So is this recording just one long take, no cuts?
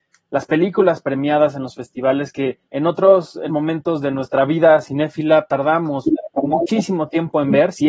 no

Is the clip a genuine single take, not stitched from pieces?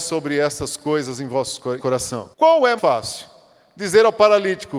no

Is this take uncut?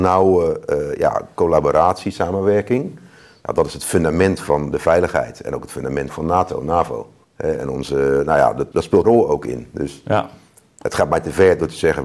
no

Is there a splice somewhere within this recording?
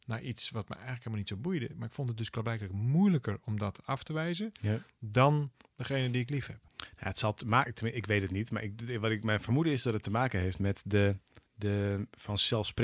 yes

